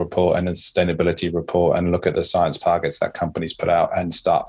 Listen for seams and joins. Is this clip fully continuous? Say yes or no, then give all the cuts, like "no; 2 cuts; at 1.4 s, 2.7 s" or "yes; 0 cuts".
no; 2 cuts; at 2.1 s, 2.6 s